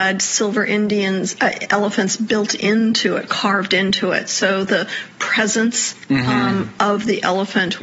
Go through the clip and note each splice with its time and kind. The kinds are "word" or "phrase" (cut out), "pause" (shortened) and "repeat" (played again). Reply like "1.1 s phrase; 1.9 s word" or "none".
none